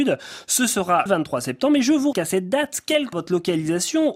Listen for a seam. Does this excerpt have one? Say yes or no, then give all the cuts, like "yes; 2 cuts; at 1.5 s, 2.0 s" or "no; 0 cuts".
yes; 3 cuts; at 1.1 s, 2.1 s, 3.1 s